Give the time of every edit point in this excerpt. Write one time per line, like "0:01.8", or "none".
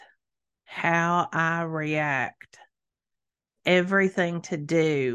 0:03.6